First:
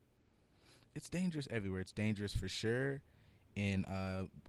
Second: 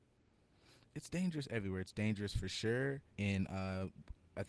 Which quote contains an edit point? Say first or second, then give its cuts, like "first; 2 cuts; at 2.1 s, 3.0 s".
second; 1 cut; at 3.1 s